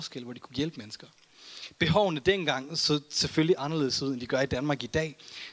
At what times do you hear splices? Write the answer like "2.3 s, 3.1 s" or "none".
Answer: none